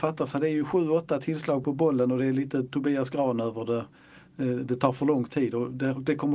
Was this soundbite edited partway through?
no; 0 cuts

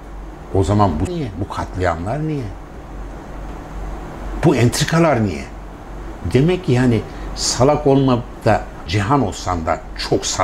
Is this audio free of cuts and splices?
no; 2 cuts; at 1.1 s, 8.9 s

